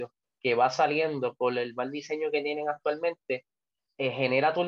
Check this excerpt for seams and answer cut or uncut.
uncut